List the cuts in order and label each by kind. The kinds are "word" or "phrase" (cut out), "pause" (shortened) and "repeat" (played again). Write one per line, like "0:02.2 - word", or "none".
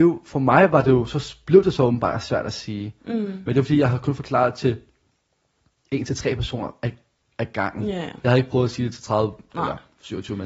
none